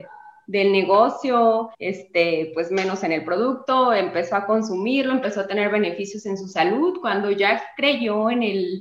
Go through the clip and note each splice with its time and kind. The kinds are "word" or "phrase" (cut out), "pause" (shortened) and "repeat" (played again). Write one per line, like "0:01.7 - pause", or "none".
0:01.7 - pause